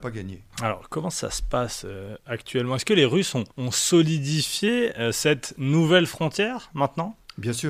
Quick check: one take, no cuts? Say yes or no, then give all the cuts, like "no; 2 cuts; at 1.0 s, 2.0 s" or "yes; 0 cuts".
no; 1 cut; at 3.5 s